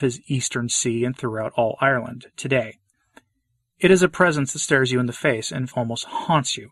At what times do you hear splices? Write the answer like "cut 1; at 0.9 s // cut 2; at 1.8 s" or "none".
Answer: cut 1; at 5.7 s